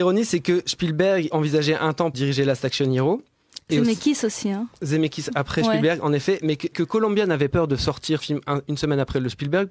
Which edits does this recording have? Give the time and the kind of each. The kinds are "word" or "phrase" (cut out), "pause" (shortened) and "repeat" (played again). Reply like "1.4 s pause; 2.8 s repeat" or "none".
1.3 s word; 2.1 s word; 6.7 s word; 7.5 s word; 8.2 s word